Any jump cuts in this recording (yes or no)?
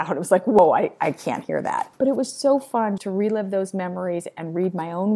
yes